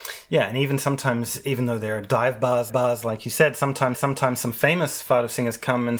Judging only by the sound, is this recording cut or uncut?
cut